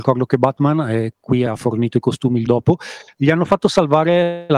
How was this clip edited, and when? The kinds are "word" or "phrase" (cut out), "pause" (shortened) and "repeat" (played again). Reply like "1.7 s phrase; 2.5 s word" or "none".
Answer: 1.5 s phrase; 2.5 s word